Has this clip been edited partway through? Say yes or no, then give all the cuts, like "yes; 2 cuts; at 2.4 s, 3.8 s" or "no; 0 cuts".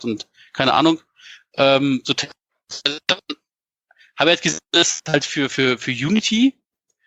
no; 0 cuts